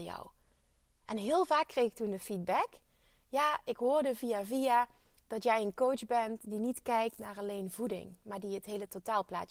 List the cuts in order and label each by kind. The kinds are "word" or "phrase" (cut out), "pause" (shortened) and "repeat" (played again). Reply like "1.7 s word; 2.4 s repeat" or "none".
none